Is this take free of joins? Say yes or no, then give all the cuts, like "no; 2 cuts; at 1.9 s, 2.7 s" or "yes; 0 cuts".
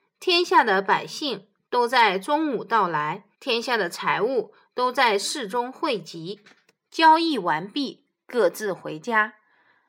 no; 1 cut; at 3.3 s